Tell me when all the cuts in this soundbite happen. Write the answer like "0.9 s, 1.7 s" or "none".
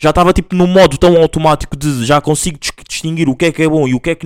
none